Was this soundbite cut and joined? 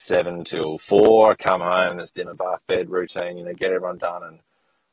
no; 0 cuts

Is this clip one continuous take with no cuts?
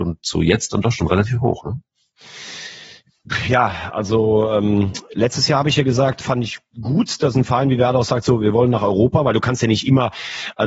yes; 0 cuts

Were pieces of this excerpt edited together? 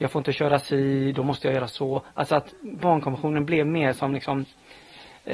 no; 0 cuts

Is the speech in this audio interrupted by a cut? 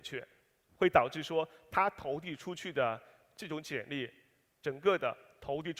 no; 0 cuts

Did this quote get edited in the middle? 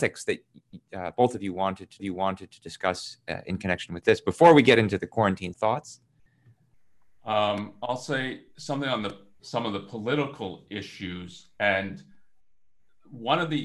yes; 2 cuts; at 2.0 s, 5.5 s

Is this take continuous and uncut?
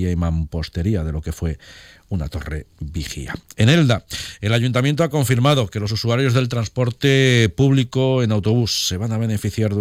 yes; 0 cuts

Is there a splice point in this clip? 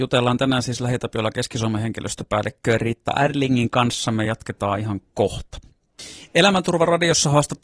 no; 0 cuts

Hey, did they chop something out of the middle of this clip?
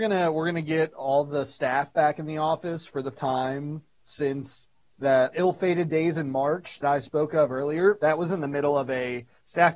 yes; 3 cuts; at 3.1 s, 5.3 s, 6.8 s

